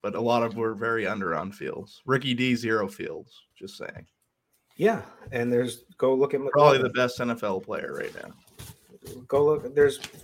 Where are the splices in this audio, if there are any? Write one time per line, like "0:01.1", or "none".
0:03.5